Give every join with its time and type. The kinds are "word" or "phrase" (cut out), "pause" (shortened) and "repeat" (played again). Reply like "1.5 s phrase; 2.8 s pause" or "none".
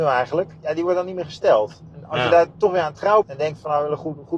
3.2 s word